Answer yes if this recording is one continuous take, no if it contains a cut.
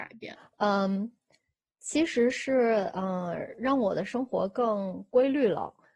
yes